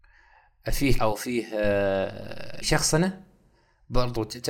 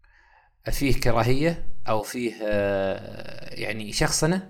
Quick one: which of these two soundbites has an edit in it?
first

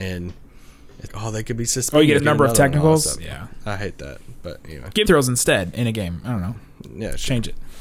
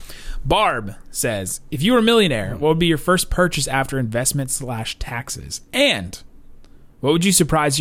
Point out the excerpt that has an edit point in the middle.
first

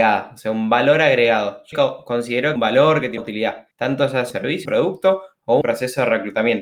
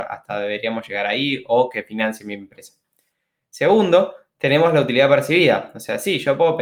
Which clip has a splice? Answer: first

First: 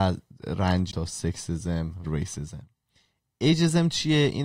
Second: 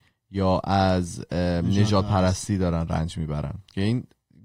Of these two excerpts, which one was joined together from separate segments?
first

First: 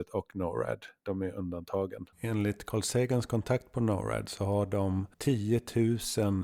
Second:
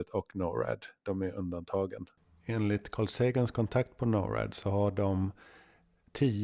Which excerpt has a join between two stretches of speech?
first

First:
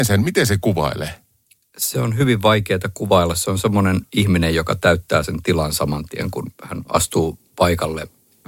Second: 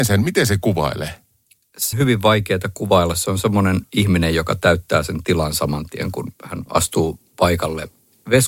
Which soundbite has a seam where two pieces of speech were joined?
second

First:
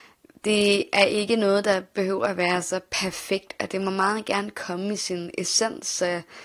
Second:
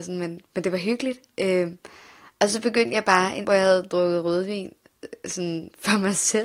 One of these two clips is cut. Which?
second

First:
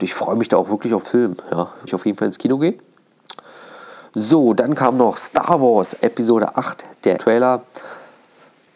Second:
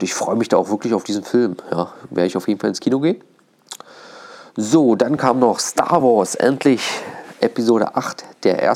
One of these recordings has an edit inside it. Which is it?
first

